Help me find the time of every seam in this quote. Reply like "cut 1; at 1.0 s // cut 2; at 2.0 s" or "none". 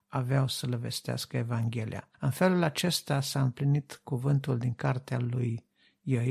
cut 1; at 2.1 s